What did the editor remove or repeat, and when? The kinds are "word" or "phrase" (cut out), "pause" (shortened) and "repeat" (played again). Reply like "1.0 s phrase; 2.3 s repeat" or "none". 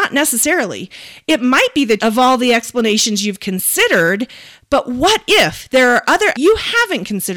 2.0 s word; 6.3 s word